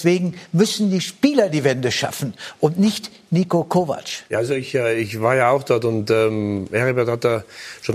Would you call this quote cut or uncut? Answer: cut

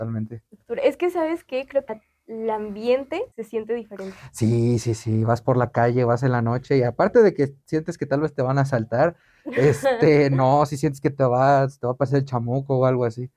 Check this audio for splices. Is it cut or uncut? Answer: cut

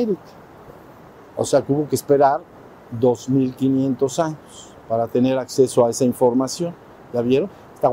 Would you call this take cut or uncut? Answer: uncut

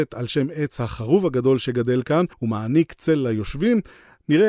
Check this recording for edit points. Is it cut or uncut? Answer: cut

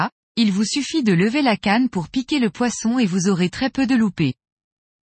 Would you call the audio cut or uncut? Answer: uncut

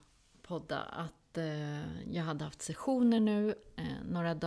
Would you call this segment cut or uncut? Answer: uncut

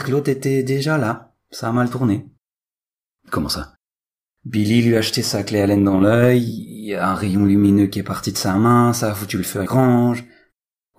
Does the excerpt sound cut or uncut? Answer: cut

